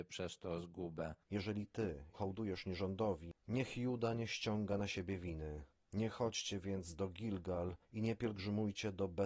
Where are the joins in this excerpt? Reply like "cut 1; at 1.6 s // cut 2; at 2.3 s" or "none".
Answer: cut 1; at 1.2 s // cut 2; at 2.1 s // cut 3; at 7.8 s